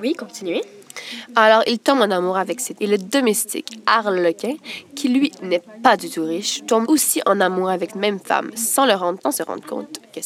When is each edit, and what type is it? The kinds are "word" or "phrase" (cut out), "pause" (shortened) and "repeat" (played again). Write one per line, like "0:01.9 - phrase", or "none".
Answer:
0:02.8 - word
0:06.8 - word
0:07.9 - word
0:09.2 - word